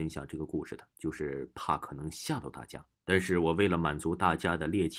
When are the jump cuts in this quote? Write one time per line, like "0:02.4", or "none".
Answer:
0:00.9
0:02.9